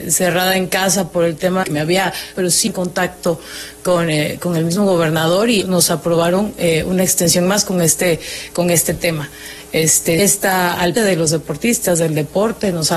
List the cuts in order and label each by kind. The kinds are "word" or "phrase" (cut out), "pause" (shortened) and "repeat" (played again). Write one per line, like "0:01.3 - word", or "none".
0:01.6 - word
0:02.3 - word
0:02.7 - word
0:05.6 - word
0:10.2 - word
0:11.0 - word